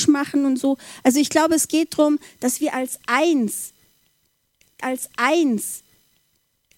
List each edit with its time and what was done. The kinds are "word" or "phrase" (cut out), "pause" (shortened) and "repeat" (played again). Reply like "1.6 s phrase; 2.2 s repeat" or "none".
4.8 s repeat